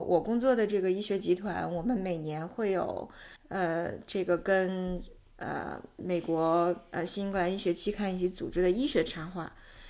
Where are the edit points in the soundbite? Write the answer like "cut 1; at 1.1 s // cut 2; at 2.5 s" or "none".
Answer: cut 1; at 3.4 s